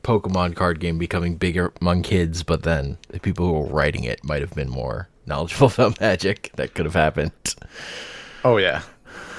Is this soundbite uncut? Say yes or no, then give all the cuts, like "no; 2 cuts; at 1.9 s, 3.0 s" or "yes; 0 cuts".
no; 2 cuts; at 3.0 s, 5.2 s